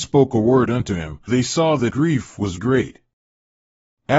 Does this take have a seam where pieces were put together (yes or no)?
yes